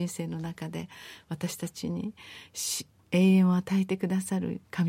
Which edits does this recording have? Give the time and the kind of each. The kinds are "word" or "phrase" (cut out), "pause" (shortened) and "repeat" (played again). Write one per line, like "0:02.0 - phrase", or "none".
none